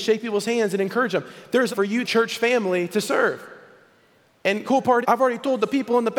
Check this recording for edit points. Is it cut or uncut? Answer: cut